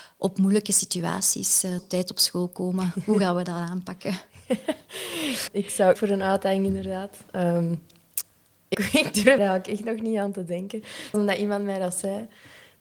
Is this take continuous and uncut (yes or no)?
no